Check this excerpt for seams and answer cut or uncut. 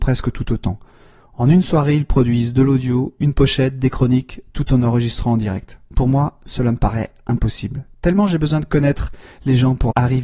uncut